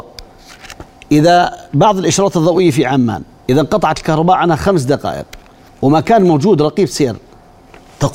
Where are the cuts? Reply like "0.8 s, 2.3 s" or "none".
none

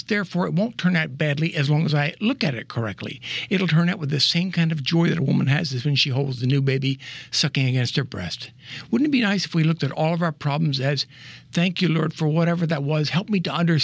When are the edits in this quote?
none

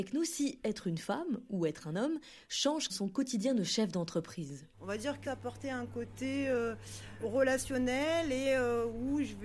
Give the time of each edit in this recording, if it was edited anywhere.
2.9 s, 4.7 s, 5.2 s

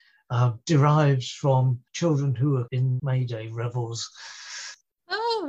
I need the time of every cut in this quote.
1.9 s, 2.7 s, 3.0 s

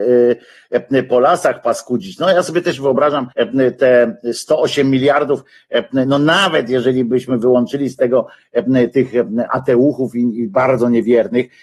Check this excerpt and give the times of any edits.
3.3 s

